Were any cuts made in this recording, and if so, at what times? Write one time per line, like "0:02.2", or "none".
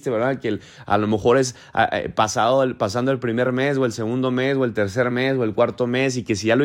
none

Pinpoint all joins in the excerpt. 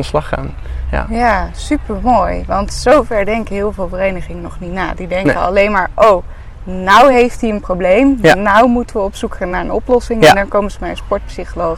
none

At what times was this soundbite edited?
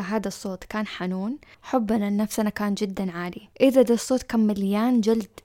0:01.5
0:03.5

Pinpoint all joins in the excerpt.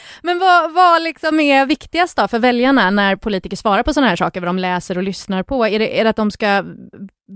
none

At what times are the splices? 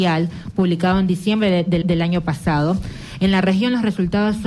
0:01.8

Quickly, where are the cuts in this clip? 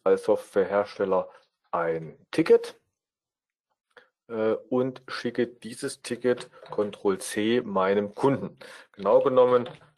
none

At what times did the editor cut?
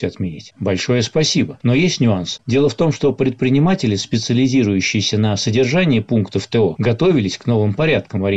none

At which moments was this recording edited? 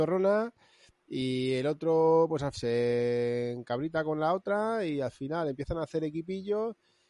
0:02.5

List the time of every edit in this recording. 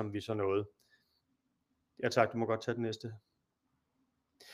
none

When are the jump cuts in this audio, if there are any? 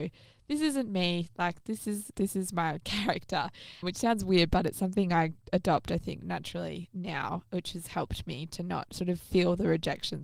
0:03.8
0:06.2

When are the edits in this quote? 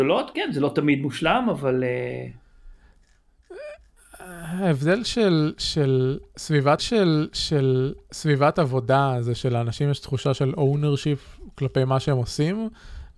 0:06.8

